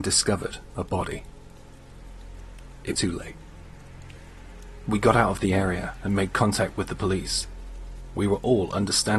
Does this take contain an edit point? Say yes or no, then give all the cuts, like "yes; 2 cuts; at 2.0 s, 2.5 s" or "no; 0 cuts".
yes; 1 cut; at 2.9 s